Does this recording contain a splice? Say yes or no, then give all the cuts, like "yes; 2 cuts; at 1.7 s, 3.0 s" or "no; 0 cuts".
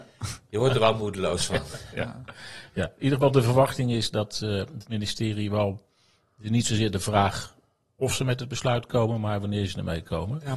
no; 0 cuts